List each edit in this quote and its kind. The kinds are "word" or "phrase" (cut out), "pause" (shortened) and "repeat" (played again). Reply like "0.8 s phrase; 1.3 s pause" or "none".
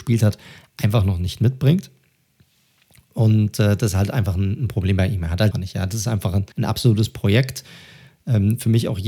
5.5 s phrase; 6.5 s pause

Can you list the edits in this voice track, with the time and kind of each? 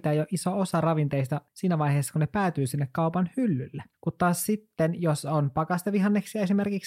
1.5 s pause; 3.9 s pause

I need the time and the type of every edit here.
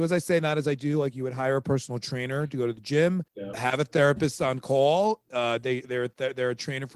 3.3 s pause

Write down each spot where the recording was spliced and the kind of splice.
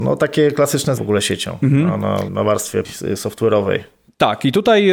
1.0 s word; 2.3 s word; 2.8 s word

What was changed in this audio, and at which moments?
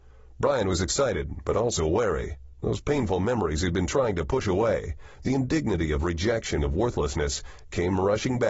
6.6 s phrase

